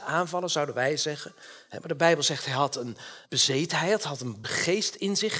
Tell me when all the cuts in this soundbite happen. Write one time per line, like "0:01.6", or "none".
0:03.2
0:04.4

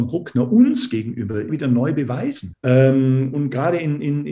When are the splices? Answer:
0:01.5
0:02.5

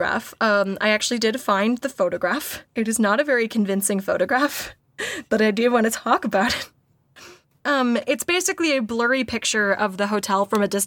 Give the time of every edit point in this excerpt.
0:02.7

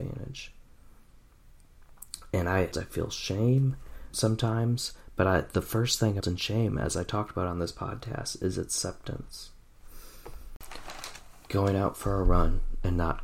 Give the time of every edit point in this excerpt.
0:02.7
0:04.1
0:06.2

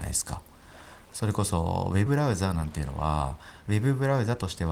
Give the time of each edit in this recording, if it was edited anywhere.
0:02.1

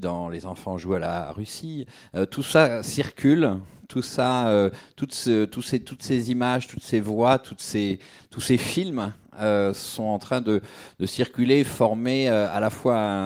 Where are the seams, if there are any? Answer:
none

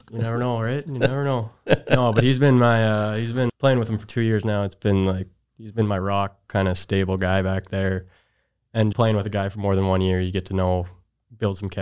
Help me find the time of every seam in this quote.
0:03.5
0:08.9

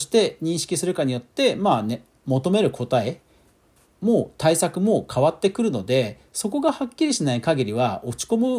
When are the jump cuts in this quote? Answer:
none

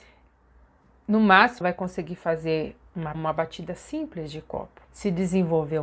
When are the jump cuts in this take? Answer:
0:01.6
0:03.1
0:04.8

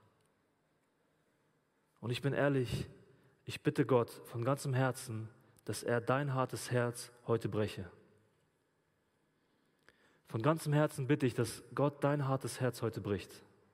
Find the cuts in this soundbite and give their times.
none

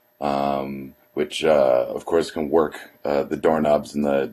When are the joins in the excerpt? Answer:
0:01.0

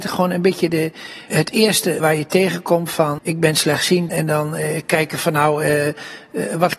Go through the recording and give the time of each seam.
0:01.3
0:02.0
0:03.2
0:04.1

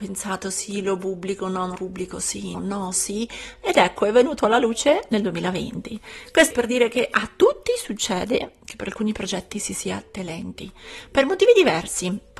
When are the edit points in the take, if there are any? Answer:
0:01.8
0:02.5
0:06.5
0:10.1

